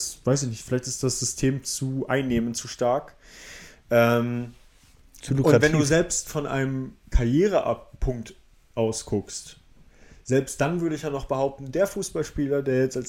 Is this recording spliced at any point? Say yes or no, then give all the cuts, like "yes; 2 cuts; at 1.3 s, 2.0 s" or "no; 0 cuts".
no; 0 cuts